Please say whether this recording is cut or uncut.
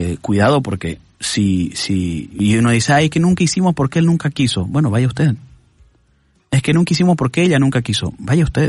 uncut